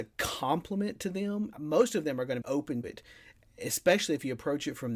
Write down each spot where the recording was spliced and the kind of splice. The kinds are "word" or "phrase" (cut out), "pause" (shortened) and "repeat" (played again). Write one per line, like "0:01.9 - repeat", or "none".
0:01.5 - word
0:02.4 - word
0:02.8 - word